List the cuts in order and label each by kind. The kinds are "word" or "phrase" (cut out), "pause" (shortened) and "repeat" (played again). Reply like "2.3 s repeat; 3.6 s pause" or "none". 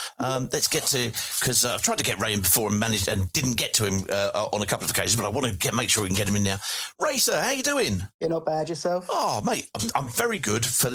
none